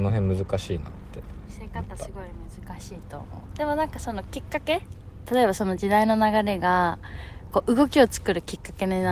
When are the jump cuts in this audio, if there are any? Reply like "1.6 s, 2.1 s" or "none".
1.5 s